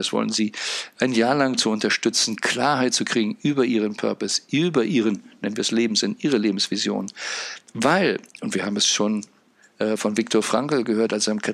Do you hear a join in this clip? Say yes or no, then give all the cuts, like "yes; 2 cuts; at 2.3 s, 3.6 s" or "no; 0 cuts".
yes; 1 cut; at 8.3 s